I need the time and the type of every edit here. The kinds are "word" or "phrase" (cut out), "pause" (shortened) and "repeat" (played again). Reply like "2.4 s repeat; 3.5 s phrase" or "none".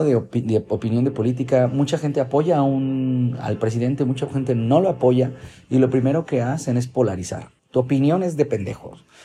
7.6 s pause